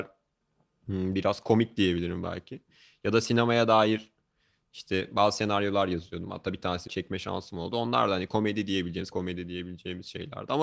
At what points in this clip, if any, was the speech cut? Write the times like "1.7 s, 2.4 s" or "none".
6.9 s, 9.1 s